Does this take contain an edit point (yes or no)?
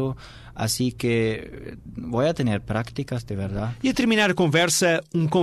no